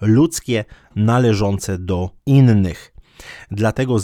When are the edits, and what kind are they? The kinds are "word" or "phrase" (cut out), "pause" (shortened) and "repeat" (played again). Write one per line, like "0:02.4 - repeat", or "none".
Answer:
0:02.2 - pause